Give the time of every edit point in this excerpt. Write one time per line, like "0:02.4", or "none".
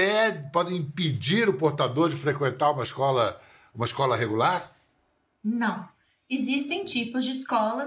none